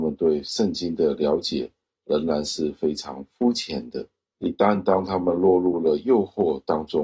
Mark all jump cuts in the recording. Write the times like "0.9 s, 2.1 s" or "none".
none